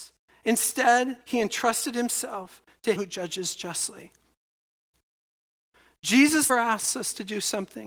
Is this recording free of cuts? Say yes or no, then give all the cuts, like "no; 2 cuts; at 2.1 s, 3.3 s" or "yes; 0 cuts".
no; 3 cuts; at 1.2 s, 3.0 s, 6.5 s